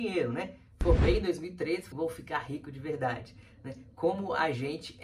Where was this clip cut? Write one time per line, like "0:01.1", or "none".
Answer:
0:01.9